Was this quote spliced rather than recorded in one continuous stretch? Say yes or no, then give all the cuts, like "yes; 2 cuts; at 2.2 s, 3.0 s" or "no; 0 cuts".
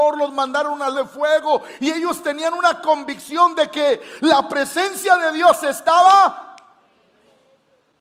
yes; 1 cut; at 0.9 s